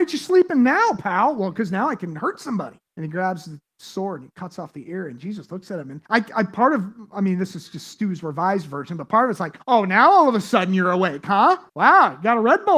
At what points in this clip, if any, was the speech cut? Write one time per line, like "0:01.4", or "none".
0:02.9
0:06.1
0:09.6
0:11.7